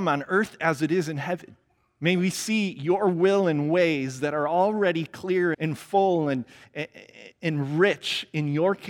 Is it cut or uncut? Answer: cut